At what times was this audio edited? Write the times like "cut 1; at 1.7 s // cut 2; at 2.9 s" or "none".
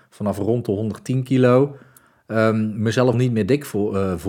cut 1; at 3.1 s